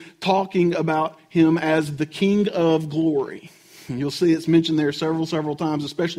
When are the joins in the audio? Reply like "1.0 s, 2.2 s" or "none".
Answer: none

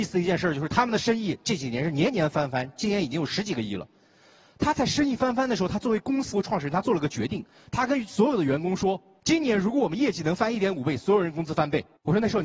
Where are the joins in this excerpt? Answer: 6.3 s

